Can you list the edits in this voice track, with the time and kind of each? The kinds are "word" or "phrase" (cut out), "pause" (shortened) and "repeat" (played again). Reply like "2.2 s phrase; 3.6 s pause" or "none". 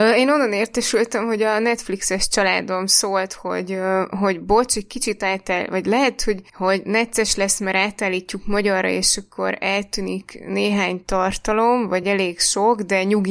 none